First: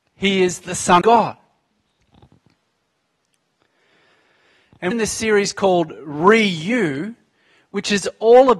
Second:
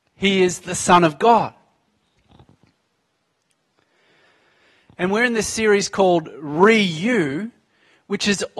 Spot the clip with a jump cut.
first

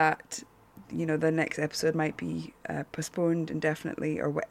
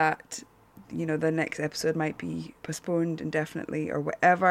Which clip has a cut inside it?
second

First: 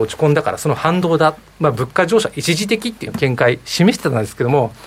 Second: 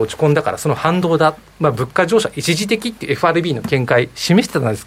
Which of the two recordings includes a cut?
first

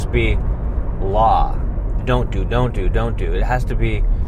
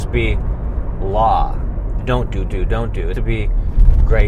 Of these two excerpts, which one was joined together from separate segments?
second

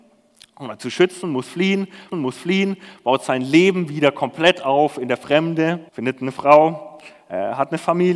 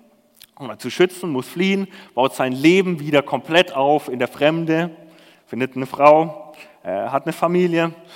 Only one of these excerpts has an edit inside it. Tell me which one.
first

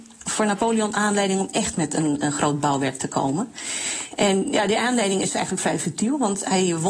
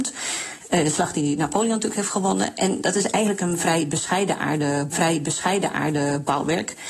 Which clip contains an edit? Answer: second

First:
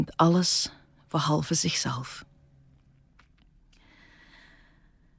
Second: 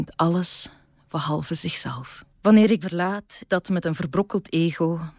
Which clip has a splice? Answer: second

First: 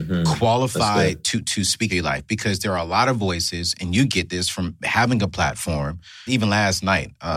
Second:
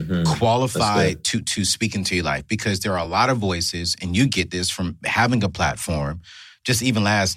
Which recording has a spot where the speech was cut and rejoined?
first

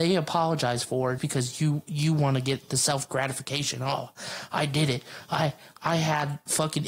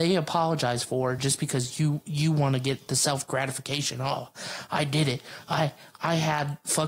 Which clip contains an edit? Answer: first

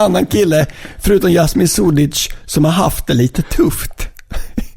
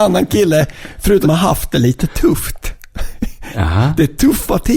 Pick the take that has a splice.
second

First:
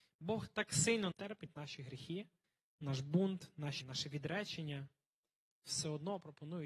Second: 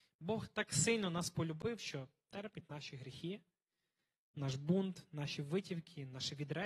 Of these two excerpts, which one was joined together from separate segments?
first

